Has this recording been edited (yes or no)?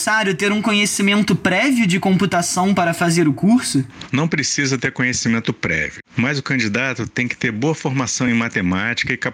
no